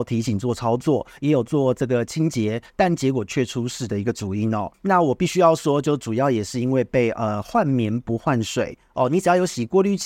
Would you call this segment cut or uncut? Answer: cut